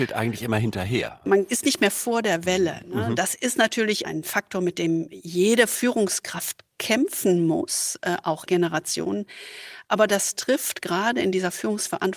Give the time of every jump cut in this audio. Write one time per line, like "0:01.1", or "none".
0:08.5